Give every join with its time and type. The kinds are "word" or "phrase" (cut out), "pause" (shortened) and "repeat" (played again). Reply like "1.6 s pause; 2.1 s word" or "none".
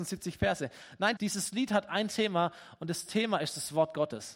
1.2 s word